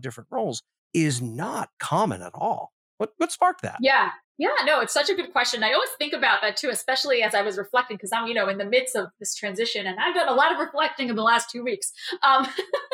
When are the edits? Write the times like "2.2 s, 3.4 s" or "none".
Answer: 4.2 s